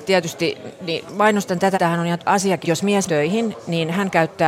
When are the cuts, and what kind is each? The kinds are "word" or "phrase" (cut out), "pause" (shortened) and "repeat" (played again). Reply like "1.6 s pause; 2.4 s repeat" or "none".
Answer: 1.1 s word; 1.7 s word; 2.2 s word; 2.6 s phrase; 3.1 s word